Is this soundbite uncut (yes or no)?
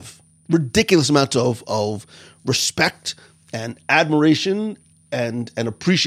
yes